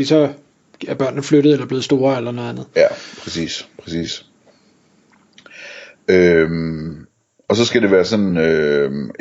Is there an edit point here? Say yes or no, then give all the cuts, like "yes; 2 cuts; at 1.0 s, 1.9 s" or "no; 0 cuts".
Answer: no; 0 cuts